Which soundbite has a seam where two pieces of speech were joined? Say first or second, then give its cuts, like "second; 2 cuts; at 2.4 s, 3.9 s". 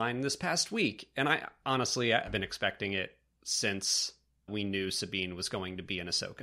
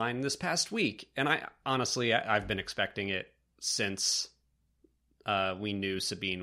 first; 2 cuts; at 2.3 s, 4.5 s